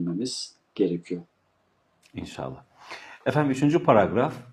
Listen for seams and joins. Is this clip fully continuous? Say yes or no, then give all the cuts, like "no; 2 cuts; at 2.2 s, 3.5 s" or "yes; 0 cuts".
yes; 0 cuts